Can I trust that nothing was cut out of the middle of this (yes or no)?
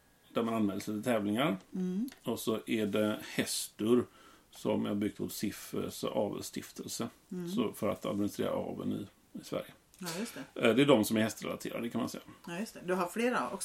yes